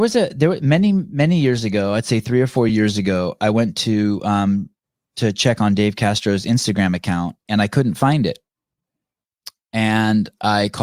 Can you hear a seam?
no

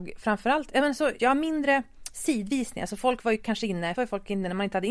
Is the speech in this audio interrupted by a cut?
yes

